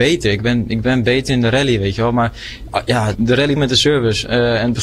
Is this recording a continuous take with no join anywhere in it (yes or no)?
no